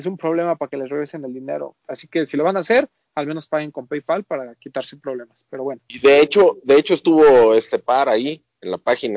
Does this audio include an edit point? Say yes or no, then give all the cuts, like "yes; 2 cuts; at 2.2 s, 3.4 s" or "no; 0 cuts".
no; 0 cuts